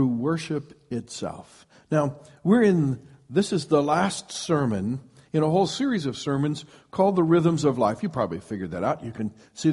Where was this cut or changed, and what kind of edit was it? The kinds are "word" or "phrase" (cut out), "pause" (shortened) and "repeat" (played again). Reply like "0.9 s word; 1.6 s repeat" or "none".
none